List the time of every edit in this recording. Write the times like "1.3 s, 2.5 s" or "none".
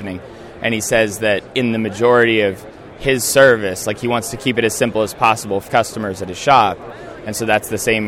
1.5 s, 5.7 s